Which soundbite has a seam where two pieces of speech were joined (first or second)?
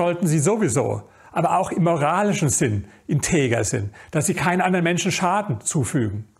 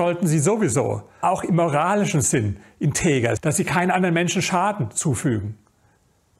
second